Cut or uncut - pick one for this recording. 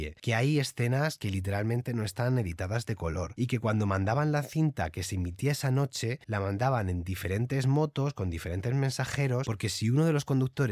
cut